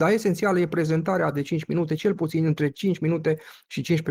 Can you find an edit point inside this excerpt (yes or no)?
no